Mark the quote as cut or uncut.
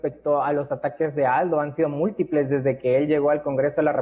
uncut